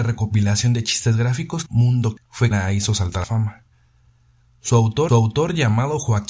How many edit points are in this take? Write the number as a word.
five